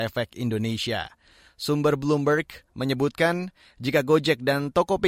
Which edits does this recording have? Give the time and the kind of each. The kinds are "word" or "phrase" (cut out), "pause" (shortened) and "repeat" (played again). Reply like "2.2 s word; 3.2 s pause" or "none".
none